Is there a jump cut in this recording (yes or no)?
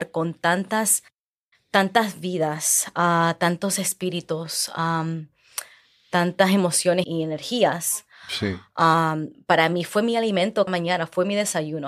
yes